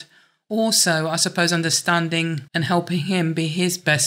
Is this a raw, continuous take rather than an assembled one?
no; 1 cut; at 2.5 s

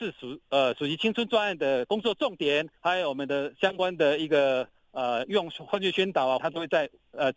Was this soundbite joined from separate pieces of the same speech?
yes; 2 cuts; at 2.8 s, 6.4 s

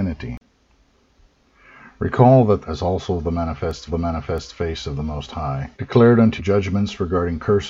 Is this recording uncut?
no; 4 cuts; at 2.6 s, 3.9 s, 5.7 s, 6.4 s

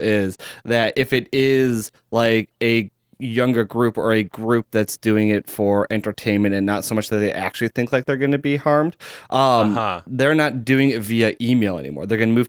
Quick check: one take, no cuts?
yes; 0 cuts

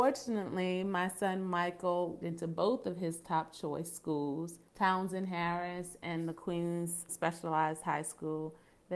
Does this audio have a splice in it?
yes; 3 cuts; at 2.2 s, 4.7 s, 7.1 s

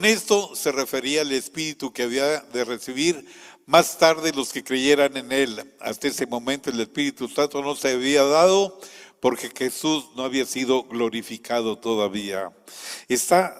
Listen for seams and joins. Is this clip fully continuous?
yes; 0 cuts

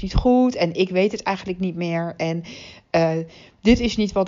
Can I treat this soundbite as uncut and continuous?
yes; 0 cuts

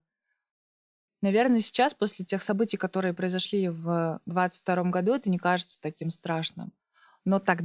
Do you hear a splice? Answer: no; 0 cuts

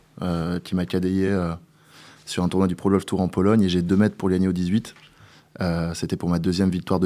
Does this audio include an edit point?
no; 0 cuts

